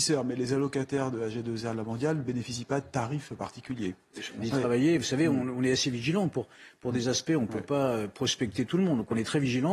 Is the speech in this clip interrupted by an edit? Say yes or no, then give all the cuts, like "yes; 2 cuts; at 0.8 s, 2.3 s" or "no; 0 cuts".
yes; 1 cut; at 4.4 s